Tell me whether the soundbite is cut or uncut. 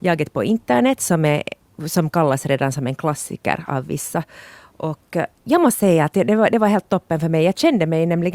uncut